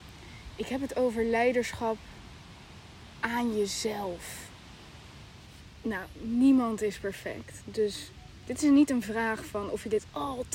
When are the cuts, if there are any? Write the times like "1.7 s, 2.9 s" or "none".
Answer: none

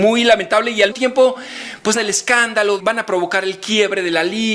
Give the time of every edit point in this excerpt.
0.9 s, 2.0 s, 2.8 s

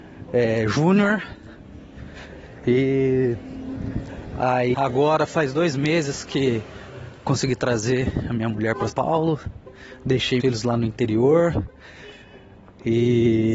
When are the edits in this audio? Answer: 4.7 s, 7.2 s, 8.9 s, 10.4 s

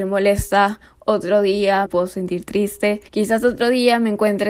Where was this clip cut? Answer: 1.9 s, 3.1 s

